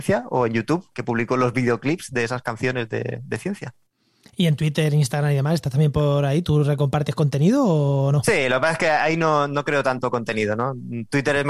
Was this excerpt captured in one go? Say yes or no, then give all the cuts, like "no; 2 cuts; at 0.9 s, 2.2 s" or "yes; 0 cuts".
yes; 0 cuts